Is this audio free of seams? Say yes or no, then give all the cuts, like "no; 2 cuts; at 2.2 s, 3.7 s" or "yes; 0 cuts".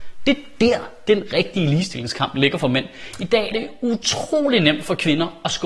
no; 1 cut; at 3.5 s